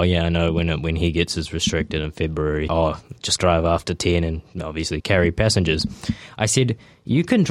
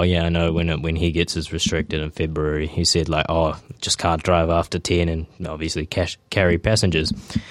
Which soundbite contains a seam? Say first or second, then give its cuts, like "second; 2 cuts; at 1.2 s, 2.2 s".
first; 3 cuts; at 2.7 s, 3.4 s, 5.0 s